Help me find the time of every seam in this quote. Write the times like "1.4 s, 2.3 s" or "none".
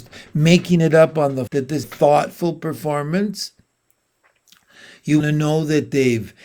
1.5 s, 1.8 s, 5.2 s